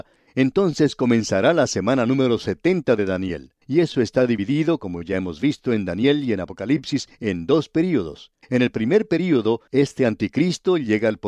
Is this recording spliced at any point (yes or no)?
yes